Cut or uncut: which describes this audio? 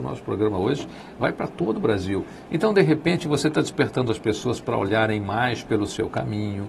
uncut